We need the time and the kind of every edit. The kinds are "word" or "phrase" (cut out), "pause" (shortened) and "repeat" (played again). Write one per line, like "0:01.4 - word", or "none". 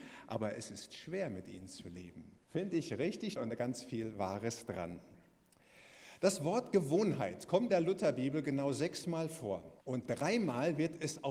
0:02.4 - pause
0:03.4 - word
0:07.7 - word
0:09.8 - pause